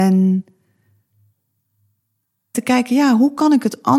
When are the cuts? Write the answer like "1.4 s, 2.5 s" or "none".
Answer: 2.5 s